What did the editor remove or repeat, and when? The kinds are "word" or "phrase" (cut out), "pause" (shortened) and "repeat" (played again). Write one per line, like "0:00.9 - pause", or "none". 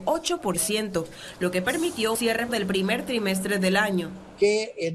0:02.1 - word
0:02.5 - word